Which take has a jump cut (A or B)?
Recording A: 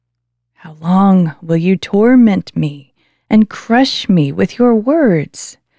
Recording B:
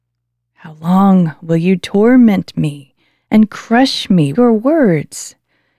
B